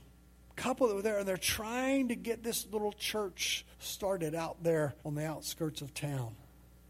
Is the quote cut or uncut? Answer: cut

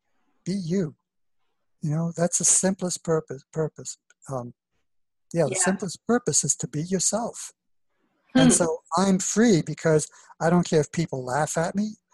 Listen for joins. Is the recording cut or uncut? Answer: uncut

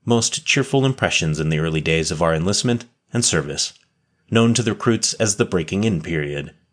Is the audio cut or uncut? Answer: uncut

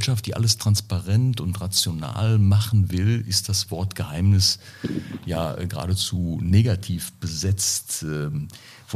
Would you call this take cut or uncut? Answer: uncut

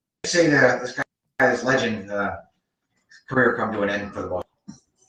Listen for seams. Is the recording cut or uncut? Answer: uncut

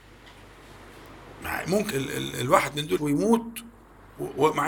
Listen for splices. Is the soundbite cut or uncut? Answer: cut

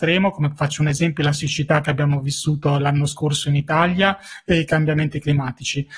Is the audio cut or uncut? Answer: uncut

